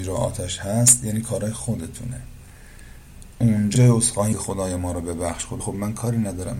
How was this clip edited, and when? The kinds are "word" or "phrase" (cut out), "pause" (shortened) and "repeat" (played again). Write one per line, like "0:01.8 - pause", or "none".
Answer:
0:03.7 - word
0:04.3 - word
0:05.6 - word

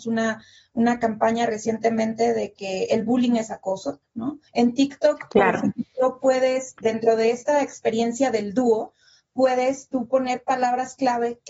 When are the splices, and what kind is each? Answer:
0:04.5 - pause
0:06.8 - word
0:09.9 - word

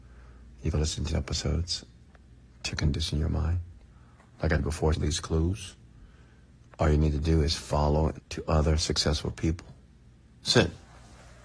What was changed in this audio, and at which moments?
0:01.1 - word
0:02.7 - word
0:04.6 - word
0:04.9 - word
0:08.2 - word

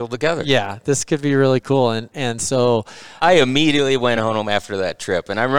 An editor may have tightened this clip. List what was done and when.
none

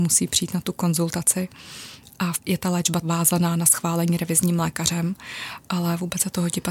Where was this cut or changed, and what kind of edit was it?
0:02.4 - word
0:03.0 - word

